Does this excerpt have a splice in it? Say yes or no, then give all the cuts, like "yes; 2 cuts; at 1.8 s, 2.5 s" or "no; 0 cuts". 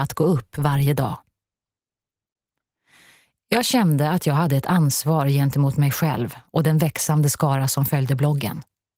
no; 0 cuts